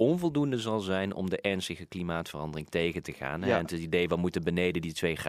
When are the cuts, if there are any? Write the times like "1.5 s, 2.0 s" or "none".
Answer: none